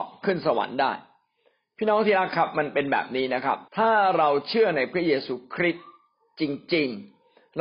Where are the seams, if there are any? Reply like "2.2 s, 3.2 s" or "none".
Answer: 3.7 s